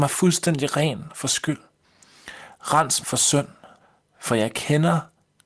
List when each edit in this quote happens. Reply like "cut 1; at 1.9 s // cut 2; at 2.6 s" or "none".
cut 1; at 3.0 s // cut 2; at 3.8 s